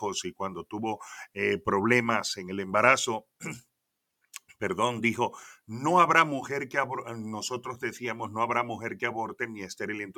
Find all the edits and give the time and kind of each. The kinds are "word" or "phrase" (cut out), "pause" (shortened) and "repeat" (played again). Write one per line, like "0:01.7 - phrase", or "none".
none